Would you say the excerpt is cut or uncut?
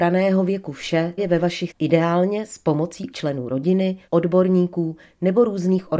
cut